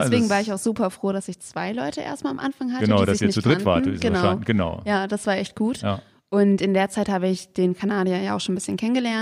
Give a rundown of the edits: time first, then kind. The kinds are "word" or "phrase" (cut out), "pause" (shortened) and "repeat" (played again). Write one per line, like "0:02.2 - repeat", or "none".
none